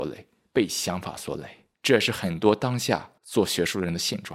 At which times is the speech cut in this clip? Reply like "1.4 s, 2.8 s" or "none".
1.7 s, 3.2 s